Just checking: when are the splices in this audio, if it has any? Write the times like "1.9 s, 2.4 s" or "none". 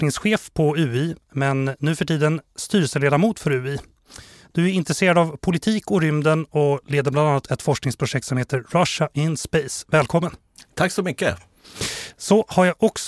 none